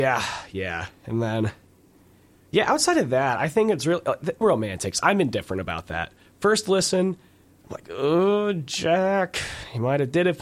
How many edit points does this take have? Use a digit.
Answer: 1